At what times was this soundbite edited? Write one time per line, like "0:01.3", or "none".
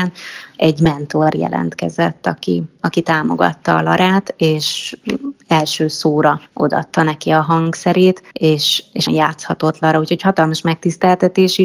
0:06.5
0:08.3
0:09.1